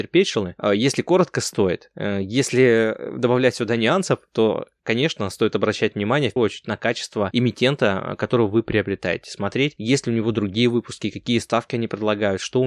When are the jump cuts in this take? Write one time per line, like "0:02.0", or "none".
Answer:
0:06.4